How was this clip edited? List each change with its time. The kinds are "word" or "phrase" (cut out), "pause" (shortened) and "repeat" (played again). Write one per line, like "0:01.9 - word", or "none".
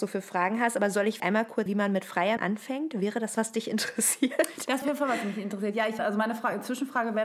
0:01.2 - word
0:01.7 - word
0:02.4 - word
0:03.3 - word
0:04.8 - word
0:06.0 - word